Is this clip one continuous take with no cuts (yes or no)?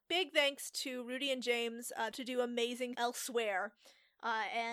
no